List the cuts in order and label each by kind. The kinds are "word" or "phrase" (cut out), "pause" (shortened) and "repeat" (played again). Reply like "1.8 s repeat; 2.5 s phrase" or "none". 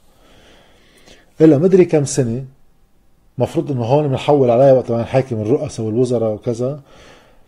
none